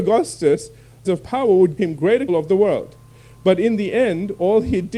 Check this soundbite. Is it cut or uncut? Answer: cut